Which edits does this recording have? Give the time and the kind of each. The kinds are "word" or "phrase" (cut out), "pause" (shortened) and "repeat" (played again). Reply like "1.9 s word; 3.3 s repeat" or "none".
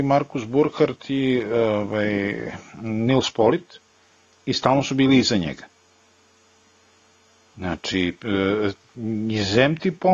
none